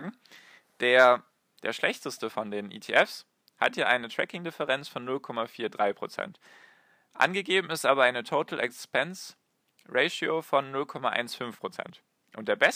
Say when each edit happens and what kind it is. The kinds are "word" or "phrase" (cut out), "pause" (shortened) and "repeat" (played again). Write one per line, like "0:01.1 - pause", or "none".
none